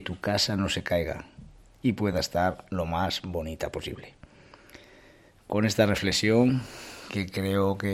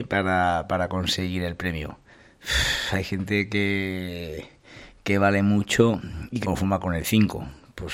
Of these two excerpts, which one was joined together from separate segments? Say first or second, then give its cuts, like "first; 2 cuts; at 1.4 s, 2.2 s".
second; 2 cuts; at 2.1 s, 6.4 s